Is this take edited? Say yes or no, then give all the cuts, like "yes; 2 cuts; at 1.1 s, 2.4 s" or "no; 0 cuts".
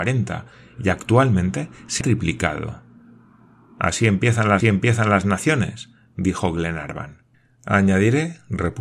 yes; 3 cuts; at 2.0 s, 4.6 s, 7.3 s